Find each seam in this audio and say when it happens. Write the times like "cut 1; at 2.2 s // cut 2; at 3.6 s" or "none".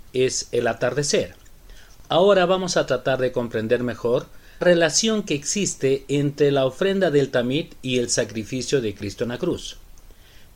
cut 1; at 4.6 s